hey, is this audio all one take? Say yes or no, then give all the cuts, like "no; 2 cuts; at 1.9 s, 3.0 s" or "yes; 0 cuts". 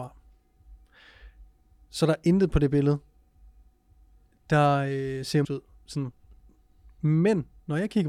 no; 1 cut; at 5.4 s